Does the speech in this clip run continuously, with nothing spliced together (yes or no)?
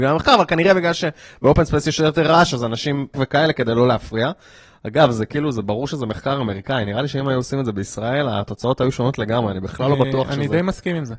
no